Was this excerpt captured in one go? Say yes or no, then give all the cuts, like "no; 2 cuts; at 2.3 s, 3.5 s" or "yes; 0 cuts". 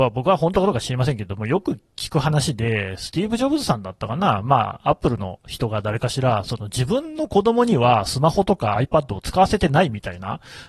yes; 0 cuts